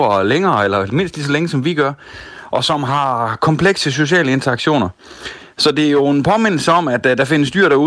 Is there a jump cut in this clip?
no; 0 cuts

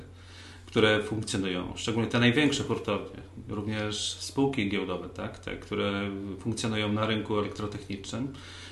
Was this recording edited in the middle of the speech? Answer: no; 0 cuts

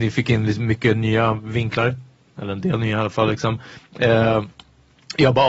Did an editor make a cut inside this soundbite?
no; 0 cuts

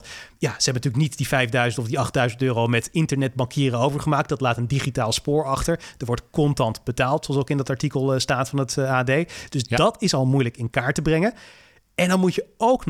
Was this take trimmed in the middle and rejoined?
no; 0 cuts

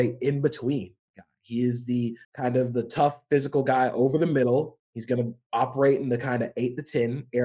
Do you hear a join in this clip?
yes; 1 cut; at 2.2 s

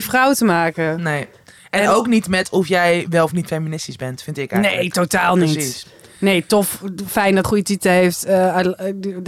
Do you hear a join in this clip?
yes; 1 cut; at 7.4 s

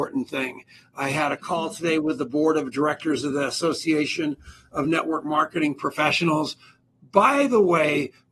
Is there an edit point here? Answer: no; 0 cuts

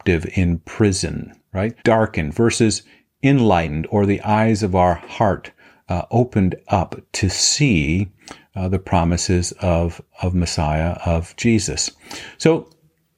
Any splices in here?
yes; 1 cut; at 1.8 s

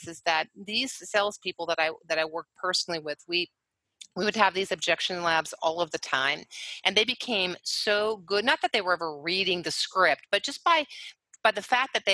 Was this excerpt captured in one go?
yes; 0 cuts

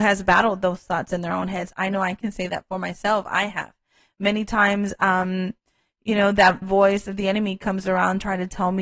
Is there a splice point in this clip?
yes; 1 cut; at 6.6 s

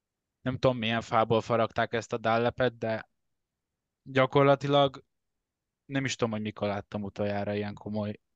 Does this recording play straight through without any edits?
yes; 0 cuts

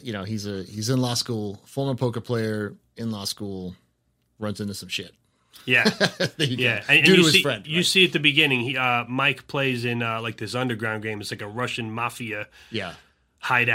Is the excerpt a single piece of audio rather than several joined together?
yes; 0 cuts

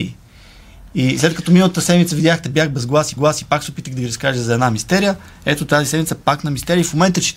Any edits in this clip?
yes; 1 cut; at 3.2 s

